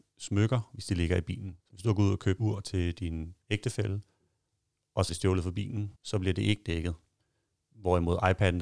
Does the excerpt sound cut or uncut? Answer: cut